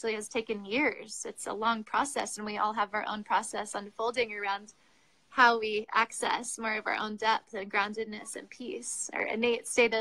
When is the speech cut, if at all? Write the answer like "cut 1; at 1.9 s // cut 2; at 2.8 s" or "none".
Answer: none